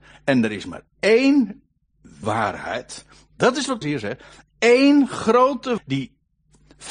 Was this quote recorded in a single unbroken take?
no; 3 cuts; at 2.2 s, 3.8 s, 5.8 s

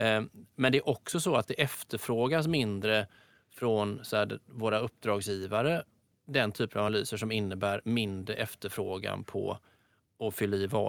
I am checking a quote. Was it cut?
no; 0 cuts

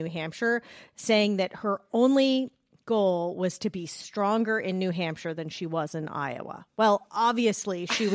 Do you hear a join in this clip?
no; 0 cuts

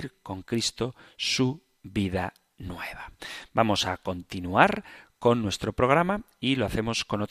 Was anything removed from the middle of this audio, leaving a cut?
no; 0 cuts

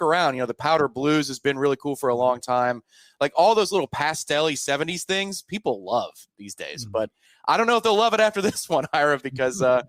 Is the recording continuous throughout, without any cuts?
yes; 0 cuts

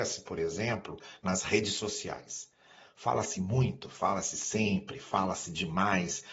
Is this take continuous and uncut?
yes; 0 cuts

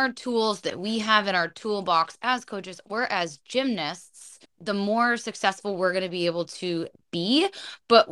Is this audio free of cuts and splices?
no; 1 cut; at 4.4 s

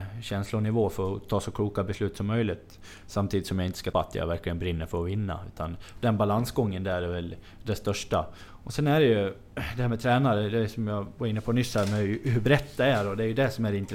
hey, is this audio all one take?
no; 1 cut; at 3.9 s

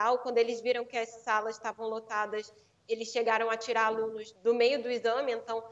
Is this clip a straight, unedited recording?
no; 1 cut; at 4.4 s

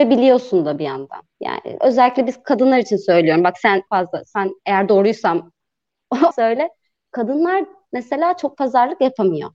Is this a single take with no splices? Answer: no; 3 cuts; at 1.3 s, 3.9 s, 6.3 s

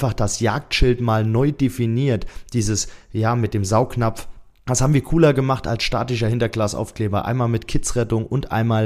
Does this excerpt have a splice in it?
no; 0 cuts

